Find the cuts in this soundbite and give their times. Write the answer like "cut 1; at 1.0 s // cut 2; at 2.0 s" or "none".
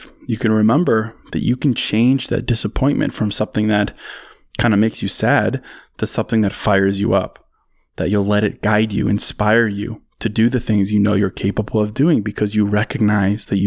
none